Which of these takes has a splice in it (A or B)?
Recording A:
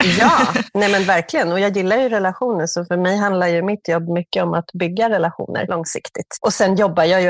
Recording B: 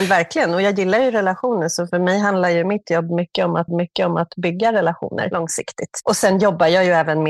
B